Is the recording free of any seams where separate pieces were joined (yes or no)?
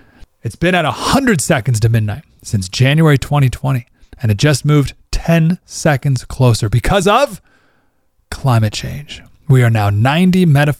yes